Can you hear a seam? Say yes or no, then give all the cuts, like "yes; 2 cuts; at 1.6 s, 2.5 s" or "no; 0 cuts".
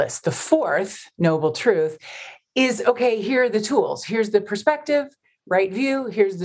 no; 0 cuts